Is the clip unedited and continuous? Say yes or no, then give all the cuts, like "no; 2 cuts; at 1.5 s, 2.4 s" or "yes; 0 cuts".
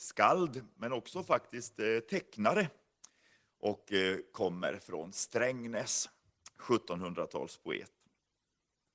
yes; 0 cuts